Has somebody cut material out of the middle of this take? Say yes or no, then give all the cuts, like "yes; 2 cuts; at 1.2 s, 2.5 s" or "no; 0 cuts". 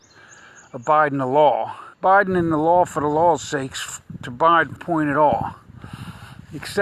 yes; 2 cuts; at 1.9 s, 4.8 s